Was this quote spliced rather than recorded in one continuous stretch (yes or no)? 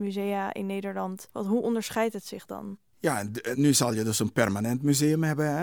yes